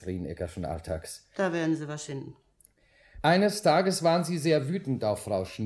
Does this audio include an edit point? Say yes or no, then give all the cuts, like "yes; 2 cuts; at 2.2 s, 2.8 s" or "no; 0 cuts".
yes; 1 cut; at 2.1 s